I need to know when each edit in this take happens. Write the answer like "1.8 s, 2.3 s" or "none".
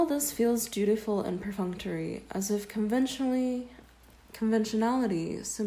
none